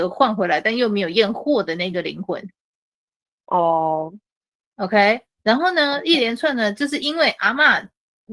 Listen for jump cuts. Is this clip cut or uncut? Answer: uncut